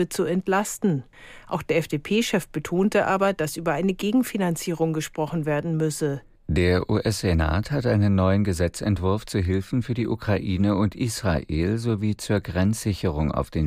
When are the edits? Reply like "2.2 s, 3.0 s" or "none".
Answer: 6.3 s